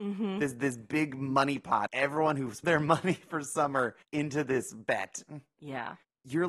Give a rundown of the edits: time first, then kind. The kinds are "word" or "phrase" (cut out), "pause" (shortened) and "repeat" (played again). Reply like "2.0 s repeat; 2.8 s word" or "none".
1.9 s word; 2.6 s phrase; 4.0 s pause